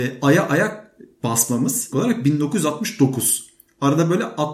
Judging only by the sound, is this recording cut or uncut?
cut